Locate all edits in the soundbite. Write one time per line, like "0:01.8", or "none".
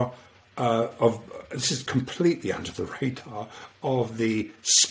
none